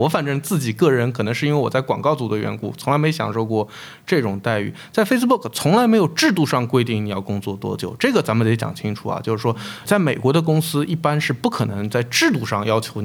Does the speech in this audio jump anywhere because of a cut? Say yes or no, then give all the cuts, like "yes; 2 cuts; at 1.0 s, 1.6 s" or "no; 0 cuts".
yes; 1 cut; at 9.9 s